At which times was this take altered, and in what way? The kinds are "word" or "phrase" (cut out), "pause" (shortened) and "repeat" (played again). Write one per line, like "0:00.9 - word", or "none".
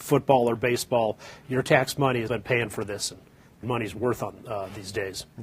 0:02.3 - word
0:03.6 - phrase